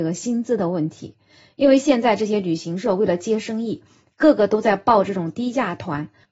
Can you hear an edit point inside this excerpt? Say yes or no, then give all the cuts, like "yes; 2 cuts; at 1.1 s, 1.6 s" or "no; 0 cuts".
no; 0 cuts